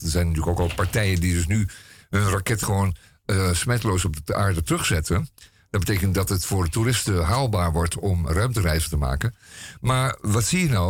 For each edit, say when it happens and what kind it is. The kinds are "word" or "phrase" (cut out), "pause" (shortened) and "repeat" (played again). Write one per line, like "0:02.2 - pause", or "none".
0:02.6 - word
0:08.3 - word